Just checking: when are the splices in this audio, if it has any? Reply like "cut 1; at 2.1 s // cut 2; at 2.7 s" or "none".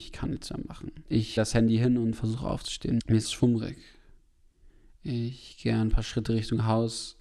cut 1; at 1.4 s // cut 2; at 3.2 s